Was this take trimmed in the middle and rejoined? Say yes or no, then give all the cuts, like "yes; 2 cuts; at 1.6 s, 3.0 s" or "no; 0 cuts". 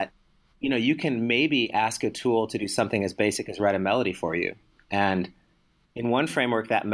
no; 0 cuts